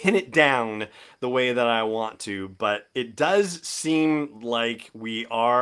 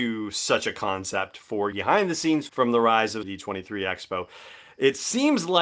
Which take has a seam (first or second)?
second